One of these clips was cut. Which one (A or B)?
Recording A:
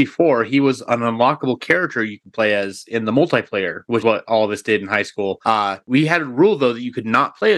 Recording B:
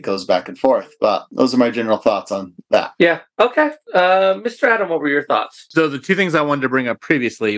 A